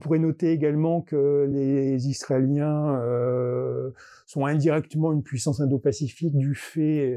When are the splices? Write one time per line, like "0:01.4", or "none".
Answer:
none